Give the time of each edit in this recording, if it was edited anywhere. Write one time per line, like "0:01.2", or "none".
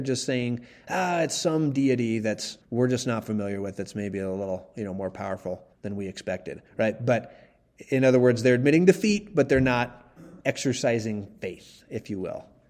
0:02.6
0:05.7
0:06.7
0:10.4